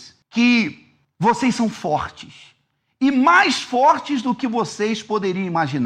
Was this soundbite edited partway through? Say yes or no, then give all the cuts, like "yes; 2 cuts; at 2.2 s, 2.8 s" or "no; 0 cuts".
no; 0 cuts